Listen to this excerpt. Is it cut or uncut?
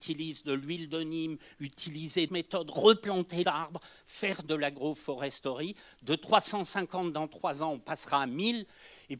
cut